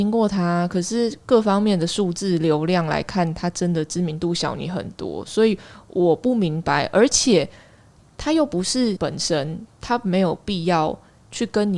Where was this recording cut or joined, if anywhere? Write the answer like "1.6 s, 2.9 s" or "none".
9.0 s